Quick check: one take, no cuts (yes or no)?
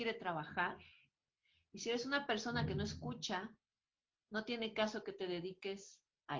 yes